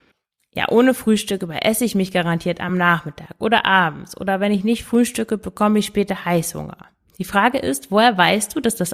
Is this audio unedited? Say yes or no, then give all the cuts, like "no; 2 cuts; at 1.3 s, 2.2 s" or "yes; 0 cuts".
yes; 0 cuts